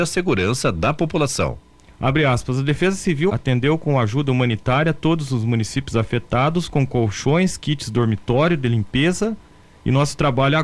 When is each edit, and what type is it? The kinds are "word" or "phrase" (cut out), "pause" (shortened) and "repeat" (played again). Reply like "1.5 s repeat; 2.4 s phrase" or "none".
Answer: 3.3 s word